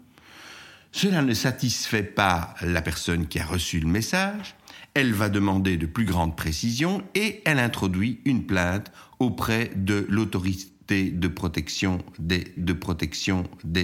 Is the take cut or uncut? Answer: cut